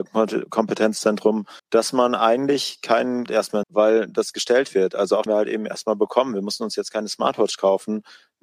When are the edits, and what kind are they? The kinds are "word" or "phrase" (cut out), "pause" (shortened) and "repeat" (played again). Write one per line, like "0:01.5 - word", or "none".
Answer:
0:01.6 - pause
0:03.3 - phrase
0:03.6 - phrase
0:05.3 - phrase